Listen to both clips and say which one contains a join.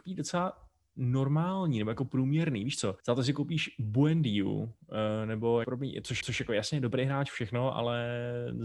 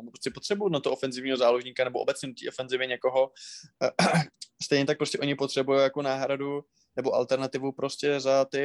first; 3 cuts; at 3.0 s, 5.6 s, 6.2 s

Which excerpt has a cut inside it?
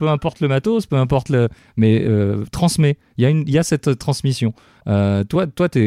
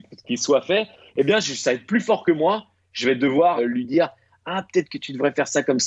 second; 1 cut; at 3.6 s

